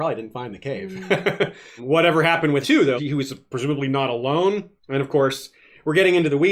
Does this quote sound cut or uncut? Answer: cut